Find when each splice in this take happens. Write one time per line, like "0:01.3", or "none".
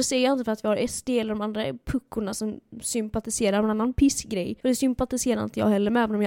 0:04.6

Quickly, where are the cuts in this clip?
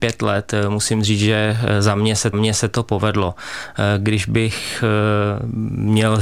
0:02.3

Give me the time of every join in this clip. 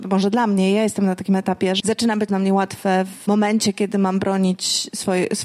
0:01.8
0:02.3

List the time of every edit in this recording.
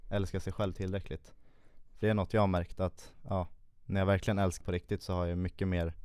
0:02.0
0:04.6

